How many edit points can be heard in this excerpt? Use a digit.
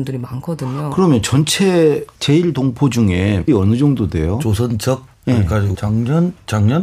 4